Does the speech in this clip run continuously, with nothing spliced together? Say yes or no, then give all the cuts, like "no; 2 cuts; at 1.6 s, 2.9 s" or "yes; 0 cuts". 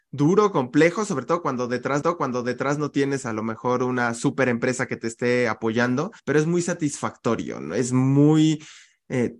no; 2 cuts; at 2.0 s, 6.2 s